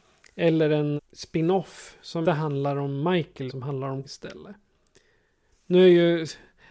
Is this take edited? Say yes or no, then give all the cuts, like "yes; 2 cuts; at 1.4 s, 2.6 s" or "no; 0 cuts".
yes; 4 cuts; at 1.0 s, 2.2 s, 3.5 s, 4.0 s